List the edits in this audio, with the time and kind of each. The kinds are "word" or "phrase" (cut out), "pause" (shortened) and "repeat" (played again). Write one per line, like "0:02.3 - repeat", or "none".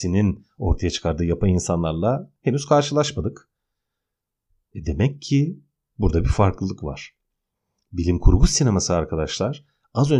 none